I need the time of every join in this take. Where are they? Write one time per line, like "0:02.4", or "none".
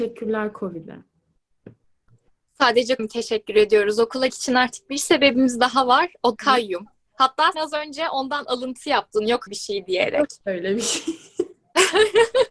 0:03.0
0:04.3
0:06.4
0:07.5
0:09.5